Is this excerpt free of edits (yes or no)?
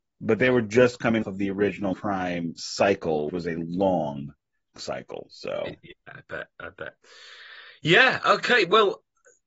no